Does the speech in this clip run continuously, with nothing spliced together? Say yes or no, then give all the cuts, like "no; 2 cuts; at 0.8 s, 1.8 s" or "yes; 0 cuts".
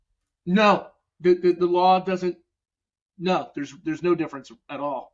yes; 0 cuts